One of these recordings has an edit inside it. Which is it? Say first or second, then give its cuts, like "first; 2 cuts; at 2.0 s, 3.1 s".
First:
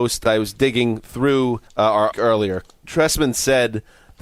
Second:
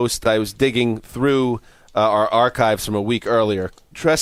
first; 2 cuts; at 1.7 s, 2.1 s